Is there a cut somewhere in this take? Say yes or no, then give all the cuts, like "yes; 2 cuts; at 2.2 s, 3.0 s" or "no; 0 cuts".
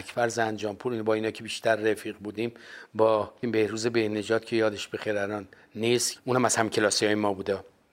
no; 0 cuts